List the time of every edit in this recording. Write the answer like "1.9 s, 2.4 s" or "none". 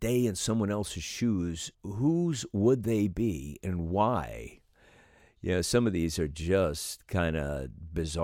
1.7 s

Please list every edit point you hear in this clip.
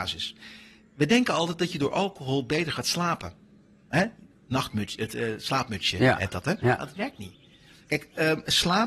none

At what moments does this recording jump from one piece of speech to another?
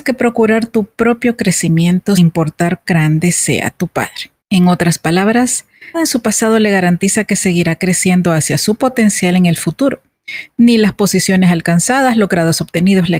2.2 s, 2.8 s, 4.4 s, 5.9 s

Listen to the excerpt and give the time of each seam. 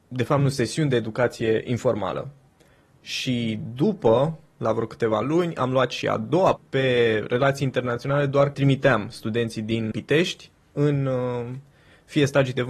6.6 s, 8.5 s, 9.9 s

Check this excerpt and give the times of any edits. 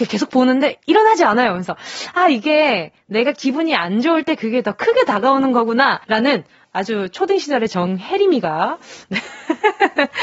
6.0 s

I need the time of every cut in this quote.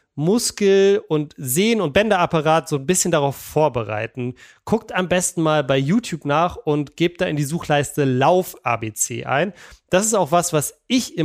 none

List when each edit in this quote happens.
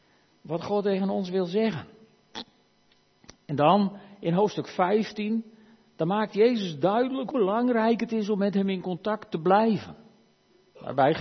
7.3 s

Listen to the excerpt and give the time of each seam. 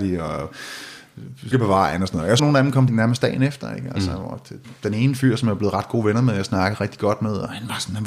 1.5 s, 2.4 s, 2.9 s

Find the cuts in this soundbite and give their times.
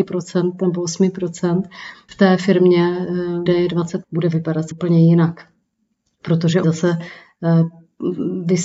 2.1 s, 3.5 s, 4.0 s, 4.7 s, 6.6 s

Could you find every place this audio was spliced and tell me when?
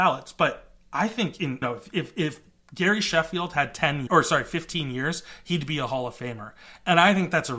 1.6 s, 4.1 s

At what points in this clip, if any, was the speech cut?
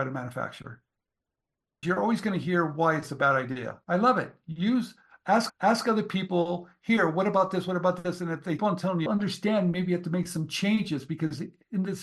1.8 s, 3.8 s, 5.5 s, 8.6 s, 9.1 s

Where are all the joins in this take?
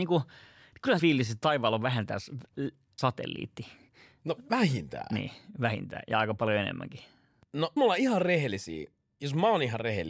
1.0 s, 3.0 s, 7.8 s

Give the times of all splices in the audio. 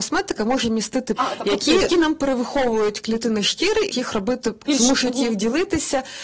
1.2 s, 1.9 s, 3.9 s, 4.7 s

